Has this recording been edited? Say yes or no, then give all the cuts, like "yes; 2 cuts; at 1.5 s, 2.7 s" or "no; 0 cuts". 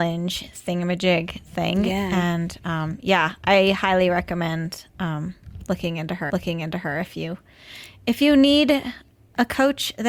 yes; 1 cut; at 6.3 s